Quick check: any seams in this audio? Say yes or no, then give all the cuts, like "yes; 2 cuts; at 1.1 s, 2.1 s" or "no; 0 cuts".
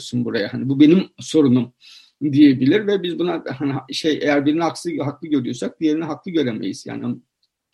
no; 0 cuts